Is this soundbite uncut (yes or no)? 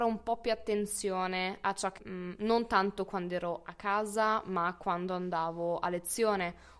no